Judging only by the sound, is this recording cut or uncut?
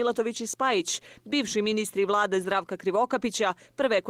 uncut